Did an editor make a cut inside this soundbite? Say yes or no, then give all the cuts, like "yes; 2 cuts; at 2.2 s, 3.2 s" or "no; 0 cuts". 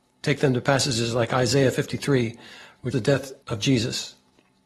yes; 2 cuts; at 2.9 s, 3.4 s